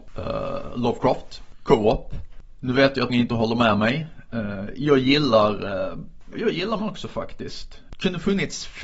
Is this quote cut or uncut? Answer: cut